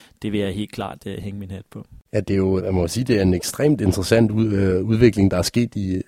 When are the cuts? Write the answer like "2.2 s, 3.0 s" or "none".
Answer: 2.0 s, 2.6 s

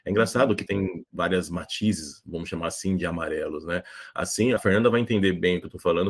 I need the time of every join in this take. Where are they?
4.6 s

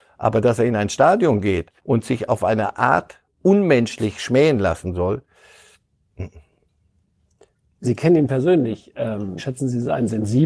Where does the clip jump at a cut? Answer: 1.8 s, 3.3 s, 7.8 s, 9.4 s

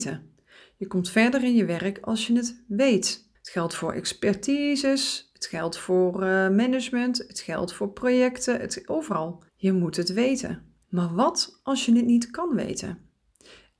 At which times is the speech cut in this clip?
3.3 s, 9.5 s, 10.8 s

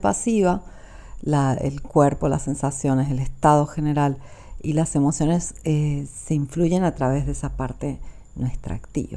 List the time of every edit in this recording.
none

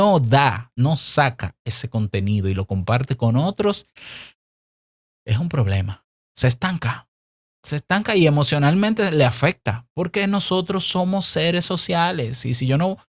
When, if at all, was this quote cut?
none

